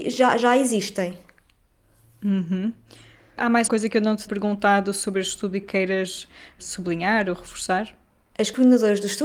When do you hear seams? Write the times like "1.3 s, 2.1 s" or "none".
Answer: 3.7 s, 4.3 s, 5.6 s